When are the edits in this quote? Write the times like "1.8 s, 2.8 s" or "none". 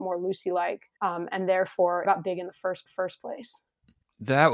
1.0 s, 2.0 s, 2.9 s